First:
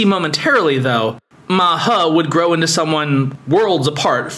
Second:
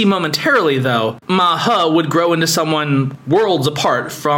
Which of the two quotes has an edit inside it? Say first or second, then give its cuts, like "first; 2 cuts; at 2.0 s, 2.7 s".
second; 1 cut; at 1.2 s